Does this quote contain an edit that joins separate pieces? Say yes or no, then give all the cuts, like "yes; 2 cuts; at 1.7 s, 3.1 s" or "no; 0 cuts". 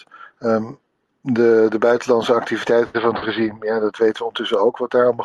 no; 0 cuts